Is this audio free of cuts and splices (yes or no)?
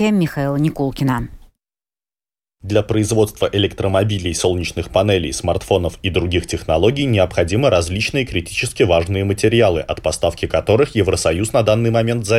yes